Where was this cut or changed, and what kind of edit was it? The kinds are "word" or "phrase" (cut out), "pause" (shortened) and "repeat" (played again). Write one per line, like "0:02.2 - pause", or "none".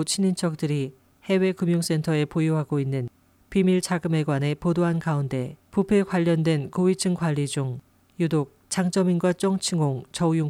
0:05.7 - pause

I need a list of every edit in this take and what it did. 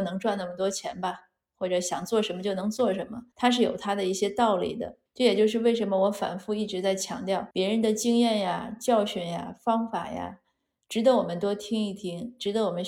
0:03.3 - pause
0:05.1 - pause
0:07.5 - pause

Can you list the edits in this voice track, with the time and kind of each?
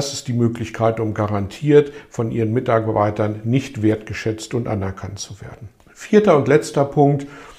0:05.8 - pause

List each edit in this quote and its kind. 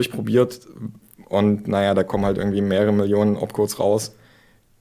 none

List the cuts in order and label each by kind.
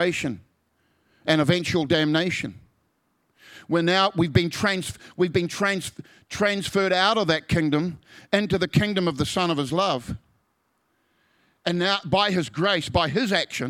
none

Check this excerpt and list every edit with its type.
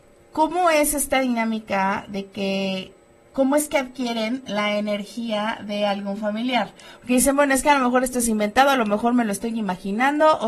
none

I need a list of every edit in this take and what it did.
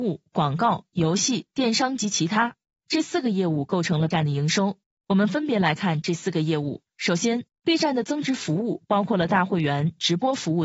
0:04.1 - word

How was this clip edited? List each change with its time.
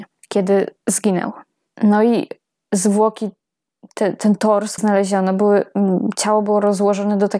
0:04.8 - word

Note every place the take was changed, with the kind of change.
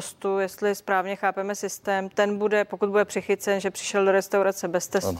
none

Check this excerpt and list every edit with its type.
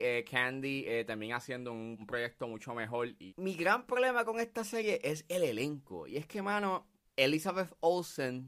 none

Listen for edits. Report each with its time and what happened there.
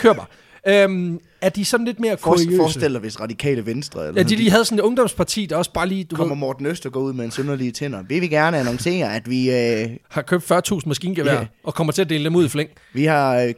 0:10.0 - pause

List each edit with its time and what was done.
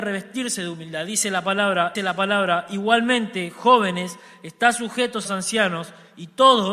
0:02.0 - repeat
0:05.3 - word

